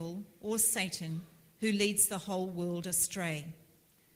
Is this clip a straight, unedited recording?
yes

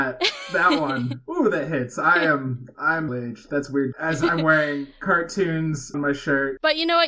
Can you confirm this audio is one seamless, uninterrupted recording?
no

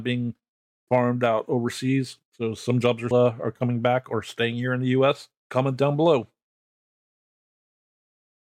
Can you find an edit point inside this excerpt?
yes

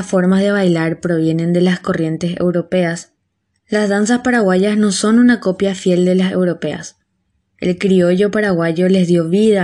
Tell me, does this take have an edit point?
no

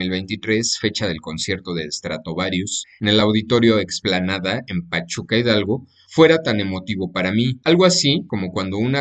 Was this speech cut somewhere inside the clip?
no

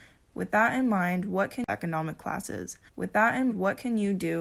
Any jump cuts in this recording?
yes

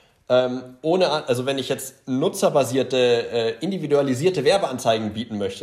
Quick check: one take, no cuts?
yes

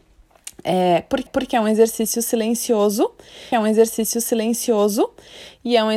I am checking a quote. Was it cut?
yes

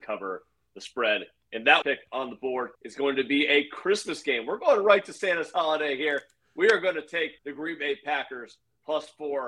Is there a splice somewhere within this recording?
yes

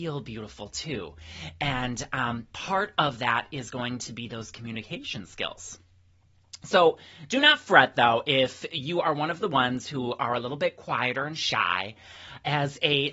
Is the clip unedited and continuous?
yes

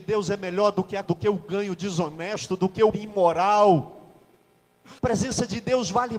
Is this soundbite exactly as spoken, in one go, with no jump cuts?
no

